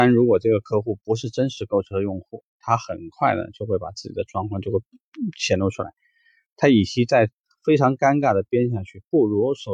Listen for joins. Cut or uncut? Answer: uncut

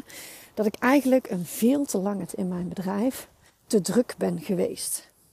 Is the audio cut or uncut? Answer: cut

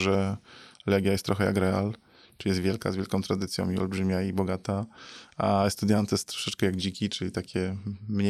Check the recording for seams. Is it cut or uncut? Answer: uncut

